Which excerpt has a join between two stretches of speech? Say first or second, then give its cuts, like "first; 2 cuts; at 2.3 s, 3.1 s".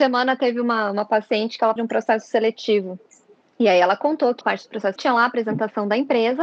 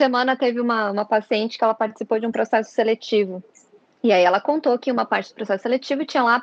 first; 3 cuts; at 1.8 s, 4.4 s, 5.0 s